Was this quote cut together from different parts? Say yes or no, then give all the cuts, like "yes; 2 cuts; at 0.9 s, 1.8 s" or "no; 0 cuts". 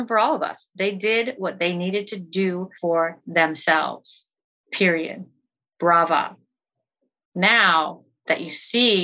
yes; 1 cut; at 2.8 s